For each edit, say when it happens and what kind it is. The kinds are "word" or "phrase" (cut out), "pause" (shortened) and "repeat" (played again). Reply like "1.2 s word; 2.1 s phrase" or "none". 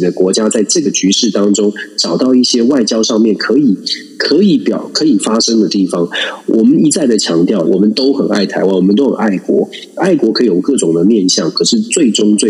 7.7 s phrase